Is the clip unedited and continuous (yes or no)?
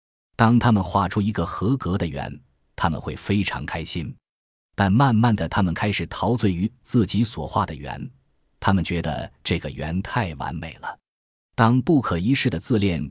yes